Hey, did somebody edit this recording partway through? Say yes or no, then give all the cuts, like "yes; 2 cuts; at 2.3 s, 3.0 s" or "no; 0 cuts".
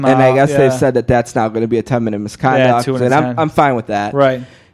no; 0 cuts